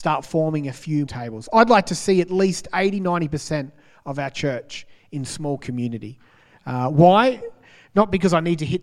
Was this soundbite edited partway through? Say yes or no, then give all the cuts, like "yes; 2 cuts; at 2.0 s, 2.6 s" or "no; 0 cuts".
yes; 1 cut; at 1.1 s